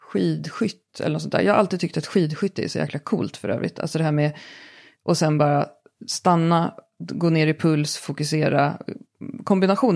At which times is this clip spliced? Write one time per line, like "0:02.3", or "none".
0:05.0